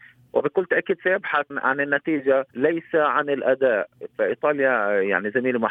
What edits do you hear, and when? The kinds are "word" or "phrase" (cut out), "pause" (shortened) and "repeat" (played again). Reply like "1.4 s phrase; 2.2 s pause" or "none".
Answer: 1.5 s word; 2.5 s pause